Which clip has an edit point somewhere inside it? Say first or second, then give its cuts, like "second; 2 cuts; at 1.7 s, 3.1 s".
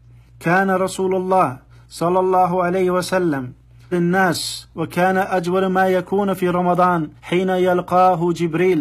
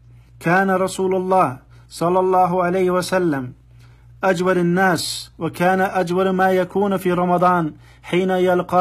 first; 2 cuts; at 3.9 s, 7.2 s